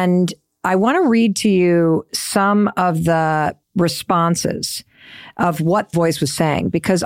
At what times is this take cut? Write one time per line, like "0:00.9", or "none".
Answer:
0:03.6
0:05.9